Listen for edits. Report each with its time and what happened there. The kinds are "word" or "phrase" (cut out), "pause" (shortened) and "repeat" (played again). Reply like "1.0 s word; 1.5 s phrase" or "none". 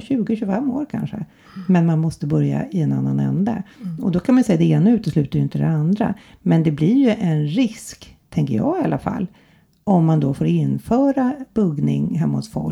none